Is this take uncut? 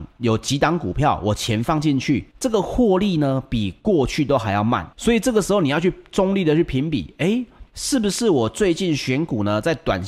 no; 3 cuts; at 2.3 s, 4.9 s, 7.7 s

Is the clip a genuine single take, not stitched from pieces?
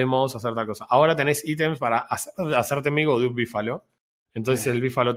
yes; 0 cuts

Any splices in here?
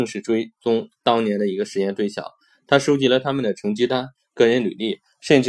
no; 0 cuts

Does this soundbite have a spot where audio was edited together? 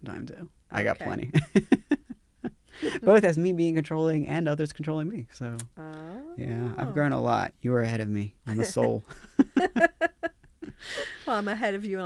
yes; 1 cut; at 8.4 s

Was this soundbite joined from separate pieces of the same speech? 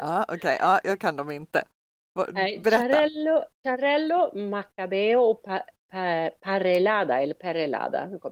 yes; 1 cut; at 3.5 s

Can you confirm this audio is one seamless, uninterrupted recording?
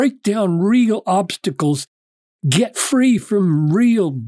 yes; 0 cuts

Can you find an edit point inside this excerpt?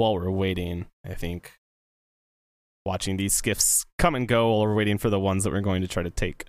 no; 0 cuts

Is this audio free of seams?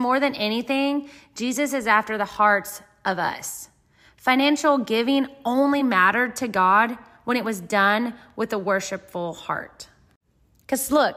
yes; 0 cuts

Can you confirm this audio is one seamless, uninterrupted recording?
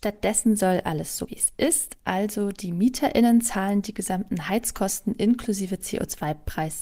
no; 1 cut; at 1.3 s

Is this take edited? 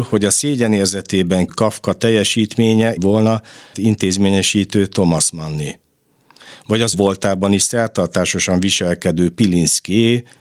yes; 4 cuts; at 1.5 s, 3.0 s, 3.7 s, 6.9 s

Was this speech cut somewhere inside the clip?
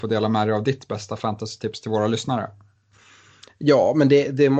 no; 0 cuts

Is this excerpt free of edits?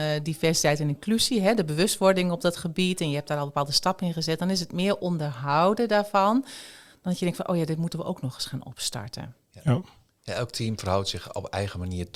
yes; 0 cuts

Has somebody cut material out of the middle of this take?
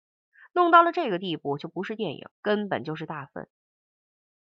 yes; 1 cut; at 2.3 s

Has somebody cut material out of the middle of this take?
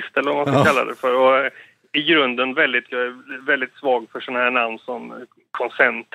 yes; 1 cut; at 2.9 s

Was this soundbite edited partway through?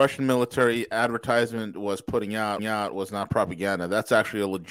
yes; 1 cut; at 2.6 s

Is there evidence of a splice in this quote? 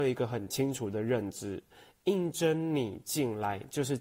no; 0 cuts

